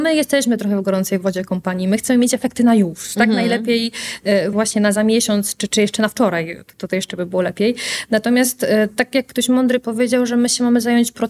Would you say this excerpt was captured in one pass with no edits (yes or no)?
no